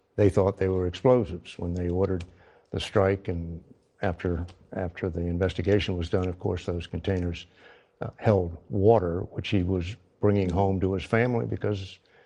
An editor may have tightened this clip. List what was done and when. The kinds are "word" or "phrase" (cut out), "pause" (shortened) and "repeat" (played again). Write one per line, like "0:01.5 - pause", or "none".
none